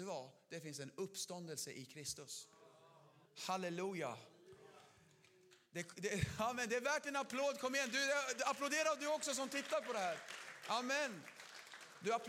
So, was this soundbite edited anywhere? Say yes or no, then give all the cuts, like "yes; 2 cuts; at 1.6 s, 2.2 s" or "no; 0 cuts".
yes; 1 cut; at 3.2 s